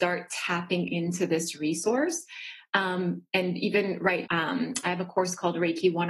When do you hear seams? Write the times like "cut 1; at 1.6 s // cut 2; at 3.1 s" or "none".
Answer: cut 1; at 4.3 s